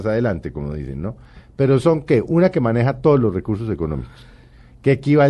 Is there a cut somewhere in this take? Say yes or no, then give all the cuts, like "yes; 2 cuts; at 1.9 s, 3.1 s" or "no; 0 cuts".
no; 0 cuts